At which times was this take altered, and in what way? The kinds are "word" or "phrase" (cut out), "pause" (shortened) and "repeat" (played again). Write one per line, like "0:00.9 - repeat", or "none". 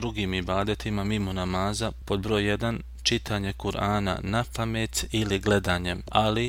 0:02.0 - word